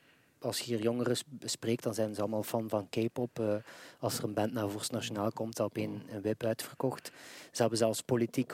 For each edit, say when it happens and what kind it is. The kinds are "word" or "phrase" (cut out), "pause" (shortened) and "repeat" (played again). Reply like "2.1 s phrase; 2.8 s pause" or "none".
5.5 s word